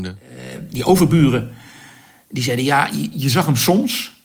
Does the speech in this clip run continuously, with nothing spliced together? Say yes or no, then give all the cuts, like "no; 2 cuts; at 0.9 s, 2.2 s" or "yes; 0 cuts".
yes; 0 cuts